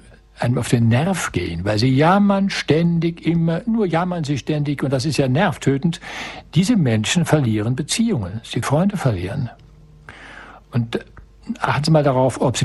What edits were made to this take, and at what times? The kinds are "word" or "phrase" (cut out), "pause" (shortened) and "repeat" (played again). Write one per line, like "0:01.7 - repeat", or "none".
0:08.6 - word